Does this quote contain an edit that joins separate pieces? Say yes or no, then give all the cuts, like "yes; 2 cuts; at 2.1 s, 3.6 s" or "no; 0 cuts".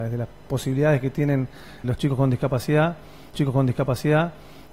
yes; 2 cuts; at 1.8 s, 3.3 s